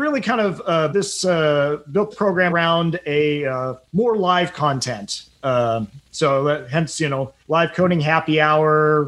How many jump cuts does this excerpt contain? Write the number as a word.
four